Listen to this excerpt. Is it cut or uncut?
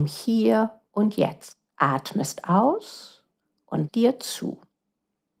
cut